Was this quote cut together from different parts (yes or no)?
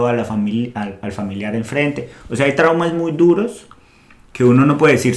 no